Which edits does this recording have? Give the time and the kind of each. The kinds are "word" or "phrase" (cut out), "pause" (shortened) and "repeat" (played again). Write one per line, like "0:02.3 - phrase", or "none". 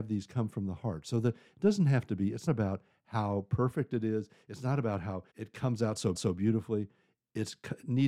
0:02.5 - word
0:05.3 - pause
0:06.1 - repeat

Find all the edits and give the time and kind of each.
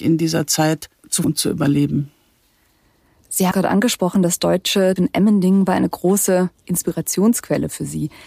0:01.2 - word
0:03.5 - word
0:05.0 - word

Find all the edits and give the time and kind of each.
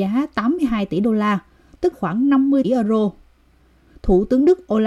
0:01.9 - word
0:02.6 - word

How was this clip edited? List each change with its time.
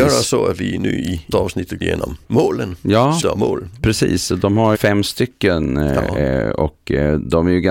0:01.3 - word
0:01.8 - word
0:03.2 - word
0:04.7 - word

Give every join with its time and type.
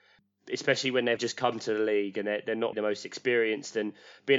0:01.2 - word
0:02.7 - word

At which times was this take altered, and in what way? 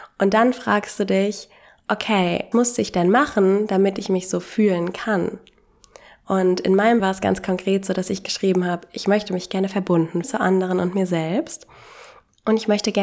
0:02.5 - word
0:07.0 - word
0:10.2 - word

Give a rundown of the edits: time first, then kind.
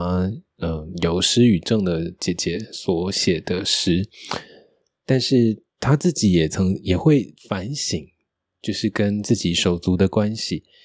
0:05.7 - pause

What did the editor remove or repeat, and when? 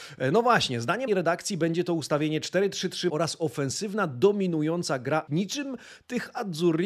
0:01.1 - word
0:03.1 - word
0:05.3 - word

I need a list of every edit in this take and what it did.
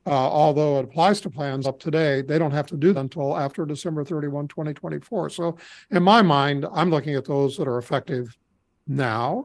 0:01.6 - word
0:02.9 - word

